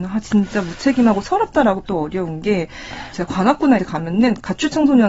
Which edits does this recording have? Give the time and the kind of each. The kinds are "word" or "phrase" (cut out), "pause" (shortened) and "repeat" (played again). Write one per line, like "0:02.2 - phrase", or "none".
0:01.8 - word
0:03.1 - word
0:03.8 - word

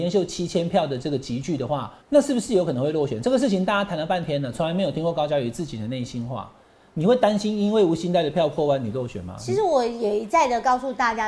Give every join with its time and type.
0:02.0 - pause

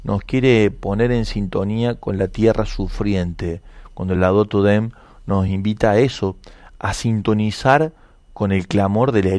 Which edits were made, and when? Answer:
none

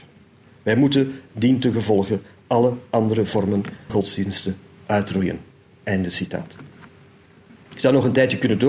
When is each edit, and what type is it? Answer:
0:03.9 - word

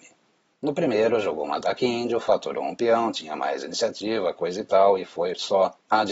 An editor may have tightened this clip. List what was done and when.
none

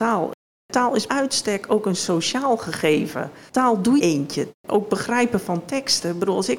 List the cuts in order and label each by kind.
0:01.1 - word
0:04.0 - phrase

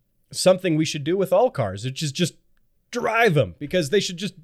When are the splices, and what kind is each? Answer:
none

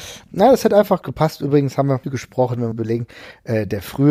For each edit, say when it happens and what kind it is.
0:01.0 - word
0:02.0 - phrase
0:02.7 - phrase

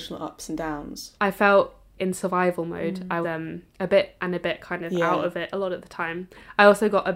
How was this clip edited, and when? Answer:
0:01.2 - pause
0:02.0 - word
0:03.2 - word
0:03.7 - pause
0:04.2 - word

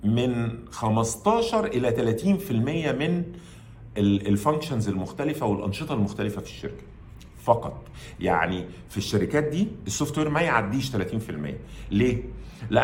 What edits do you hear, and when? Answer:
none

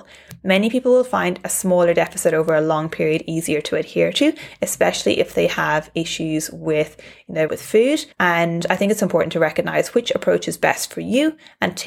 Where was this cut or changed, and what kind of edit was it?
0:07.5 - word
0:08.1 - pause

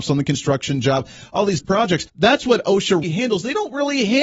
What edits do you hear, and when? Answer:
0:01.6 - word
0:02.1 - pause
0:03.0 - word

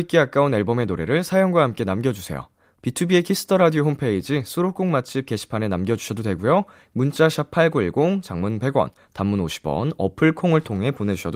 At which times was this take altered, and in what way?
none

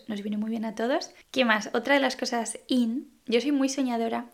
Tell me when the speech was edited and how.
none

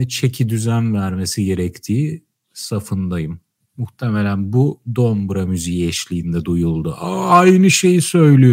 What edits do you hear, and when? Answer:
none

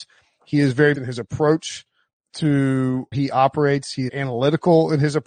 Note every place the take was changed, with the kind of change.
0:00.9 - word
0:03.1 - word
0:04.1 - word

